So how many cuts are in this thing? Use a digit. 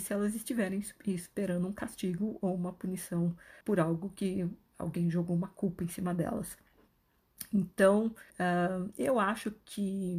2